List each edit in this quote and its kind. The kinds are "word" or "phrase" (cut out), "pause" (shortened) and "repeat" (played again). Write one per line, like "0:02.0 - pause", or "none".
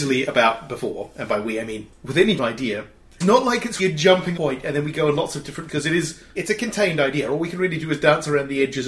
0:01.9 - word
0:02.4 - word
0:03.2 - word
0:03.8 - word
0:04.4 - word
0:05.7 - word
0:06.4 - word